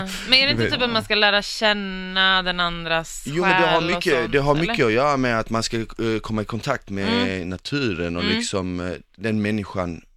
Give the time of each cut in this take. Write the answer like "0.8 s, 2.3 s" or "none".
none